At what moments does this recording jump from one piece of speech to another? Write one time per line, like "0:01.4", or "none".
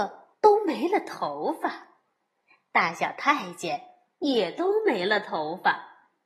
none